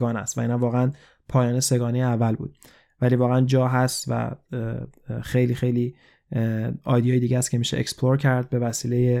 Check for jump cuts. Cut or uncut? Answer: uncut